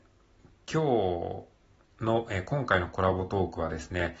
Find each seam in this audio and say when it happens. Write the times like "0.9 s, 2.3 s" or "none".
none